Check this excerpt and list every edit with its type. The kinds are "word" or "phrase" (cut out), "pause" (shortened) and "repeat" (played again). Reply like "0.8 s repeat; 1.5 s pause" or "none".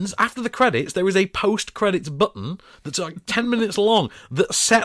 none